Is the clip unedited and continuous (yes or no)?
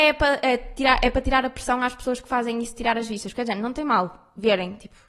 yes